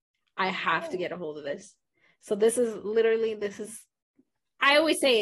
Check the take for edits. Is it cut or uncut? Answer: uncut